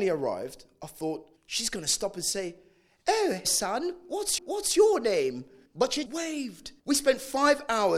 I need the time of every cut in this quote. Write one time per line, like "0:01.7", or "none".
0:01.4
0:03.4
0:04.4
0:05.7
0:06.1
0:06.8

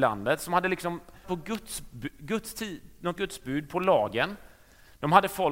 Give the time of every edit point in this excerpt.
0:01.2
0:03.2

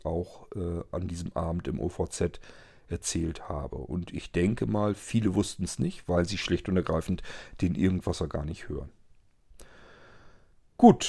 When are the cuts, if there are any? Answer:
none

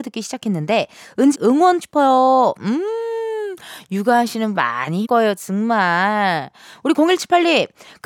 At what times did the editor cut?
0:01.3
0:01.8
0:04.5
0:05.0

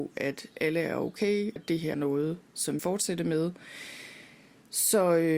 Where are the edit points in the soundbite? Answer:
0:01.6
0:01.9
0:02.8

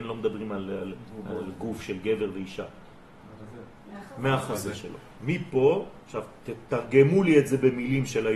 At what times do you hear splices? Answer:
0:06.0

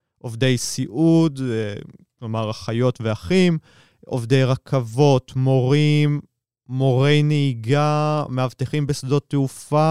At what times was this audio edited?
none

